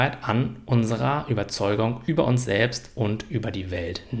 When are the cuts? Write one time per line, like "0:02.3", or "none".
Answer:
none